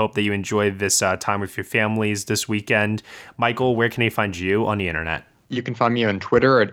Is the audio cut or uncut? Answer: uncut